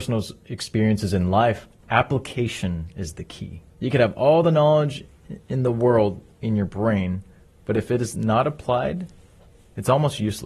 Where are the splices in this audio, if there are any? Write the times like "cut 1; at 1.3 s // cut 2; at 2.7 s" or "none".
cut 1; at 3.7 s